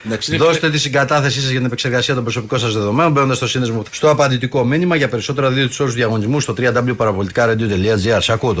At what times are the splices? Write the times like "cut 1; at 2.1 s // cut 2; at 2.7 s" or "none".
cut 1; at 3.9 s

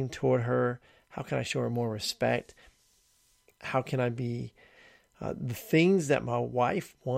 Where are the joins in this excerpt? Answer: none

